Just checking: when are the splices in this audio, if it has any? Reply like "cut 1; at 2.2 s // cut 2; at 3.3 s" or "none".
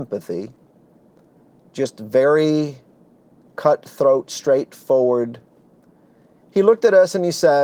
none